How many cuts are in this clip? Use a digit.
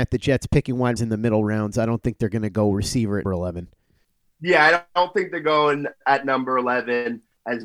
2